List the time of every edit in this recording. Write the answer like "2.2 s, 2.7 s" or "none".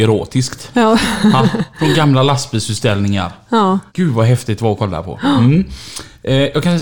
1.7 s, 3.9 s